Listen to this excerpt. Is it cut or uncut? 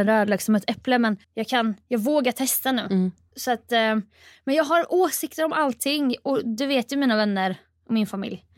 cut